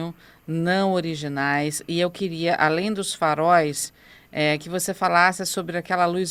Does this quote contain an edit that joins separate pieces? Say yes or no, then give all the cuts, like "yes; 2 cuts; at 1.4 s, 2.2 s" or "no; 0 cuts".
no; 0 cuts